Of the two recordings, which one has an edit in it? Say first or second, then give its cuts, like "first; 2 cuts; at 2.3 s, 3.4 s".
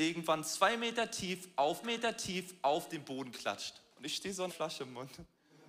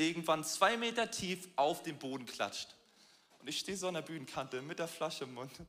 first; 3 cuts; at 1.8 s, 3.9 s, 4.5 s